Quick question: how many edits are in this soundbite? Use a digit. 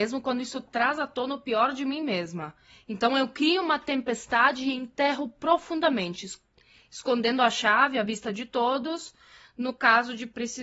0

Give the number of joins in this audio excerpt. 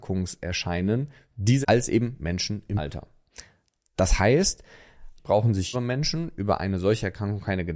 4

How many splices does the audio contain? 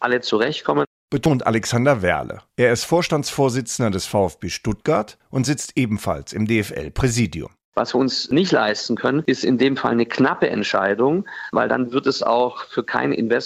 1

